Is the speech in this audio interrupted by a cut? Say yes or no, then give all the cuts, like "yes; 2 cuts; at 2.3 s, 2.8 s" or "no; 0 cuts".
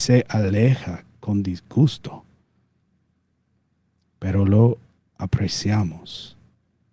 no; 0 cuts